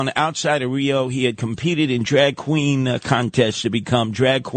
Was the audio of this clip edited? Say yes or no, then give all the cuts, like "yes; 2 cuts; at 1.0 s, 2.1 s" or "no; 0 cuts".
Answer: no; 0 cuts